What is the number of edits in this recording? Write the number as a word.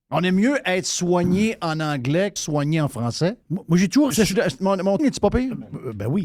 four